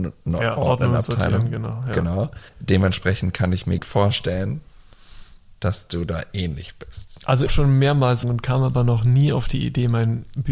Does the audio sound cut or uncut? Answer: cut